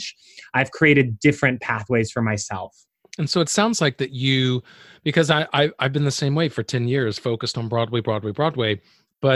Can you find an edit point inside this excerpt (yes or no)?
no